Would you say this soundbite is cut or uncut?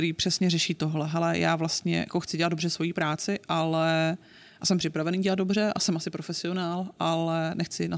uncut